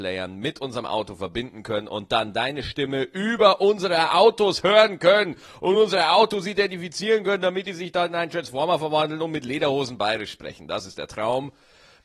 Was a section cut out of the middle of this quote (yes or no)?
no